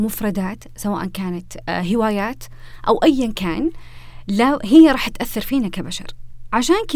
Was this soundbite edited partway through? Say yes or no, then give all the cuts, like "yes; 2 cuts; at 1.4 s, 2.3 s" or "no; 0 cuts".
no; 0 cuts